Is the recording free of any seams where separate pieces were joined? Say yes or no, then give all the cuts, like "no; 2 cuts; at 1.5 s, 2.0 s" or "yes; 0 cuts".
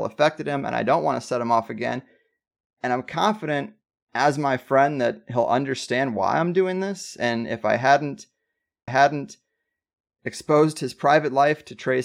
no; 1 cut; at 8.9 s